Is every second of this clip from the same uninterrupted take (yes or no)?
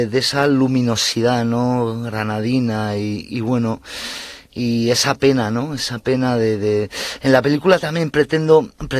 yes